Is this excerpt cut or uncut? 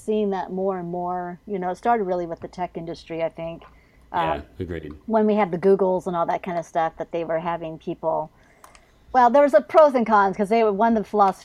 uncut